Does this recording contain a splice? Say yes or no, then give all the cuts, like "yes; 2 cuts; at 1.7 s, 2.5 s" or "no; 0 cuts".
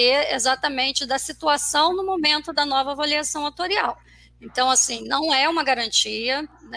no; 0 cuts